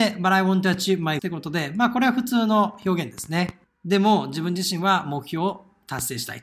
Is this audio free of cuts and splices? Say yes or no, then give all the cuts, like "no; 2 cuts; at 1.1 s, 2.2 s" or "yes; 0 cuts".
no; 2 cuts; at 1.2 s, 3.7 s